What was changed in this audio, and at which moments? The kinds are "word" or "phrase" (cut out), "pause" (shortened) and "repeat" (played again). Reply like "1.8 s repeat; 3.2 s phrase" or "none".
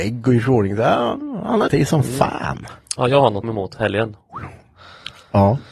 1.7 s word; 3.4 s phrase